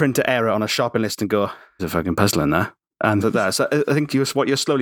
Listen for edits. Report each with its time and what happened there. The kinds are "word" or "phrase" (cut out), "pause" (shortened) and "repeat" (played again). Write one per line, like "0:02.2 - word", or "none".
0:01.8 - word
0:03.2 - word